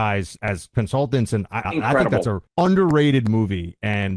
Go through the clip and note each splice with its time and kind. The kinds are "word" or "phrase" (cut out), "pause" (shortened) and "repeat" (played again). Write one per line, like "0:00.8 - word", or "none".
0:01.6 - word
0:02.5 - pause